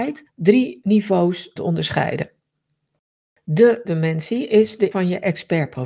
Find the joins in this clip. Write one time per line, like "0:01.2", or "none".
0:01.6
0:03.8
0:04.9